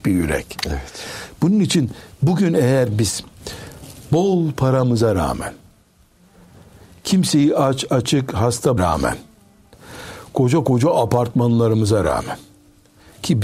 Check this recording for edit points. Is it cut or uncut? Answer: cut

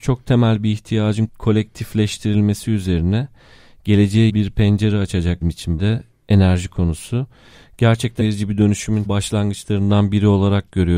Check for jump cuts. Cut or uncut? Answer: cut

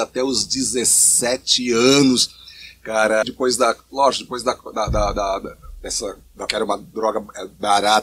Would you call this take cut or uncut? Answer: cut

